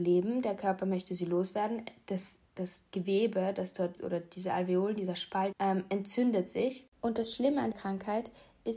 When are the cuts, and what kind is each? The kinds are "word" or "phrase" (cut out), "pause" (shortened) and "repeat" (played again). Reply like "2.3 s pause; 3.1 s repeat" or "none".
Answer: 2.5 s pause; 4.0 s word; 5.5 s word; 6.9 s pause; 7.7 s word